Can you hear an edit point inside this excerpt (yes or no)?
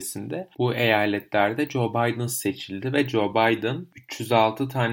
no